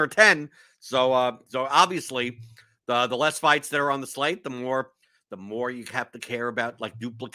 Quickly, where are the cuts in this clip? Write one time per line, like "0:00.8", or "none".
none